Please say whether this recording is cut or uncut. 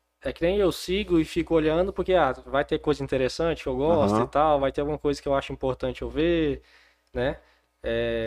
uncut